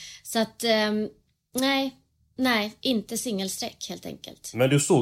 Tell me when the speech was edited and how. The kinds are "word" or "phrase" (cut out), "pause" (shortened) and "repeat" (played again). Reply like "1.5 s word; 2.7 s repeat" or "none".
none